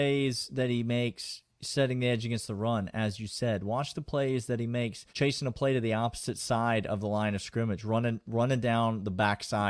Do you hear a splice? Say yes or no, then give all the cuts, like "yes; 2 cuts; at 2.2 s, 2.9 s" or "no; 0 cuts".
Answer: yes; 1 cut; at 5.1 s